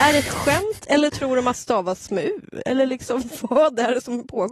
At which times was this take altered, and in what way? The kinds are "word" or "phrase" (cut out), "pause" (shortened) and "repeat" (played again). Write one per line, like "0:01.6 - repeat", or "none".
0:01.5 - word

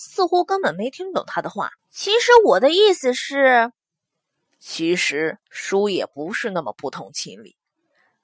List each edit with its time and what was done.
0:01.8 - pause
0:05.4 - pause

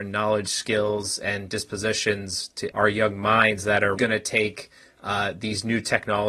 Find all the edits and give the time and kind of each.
0:02.7 - word
0:04.0 - word

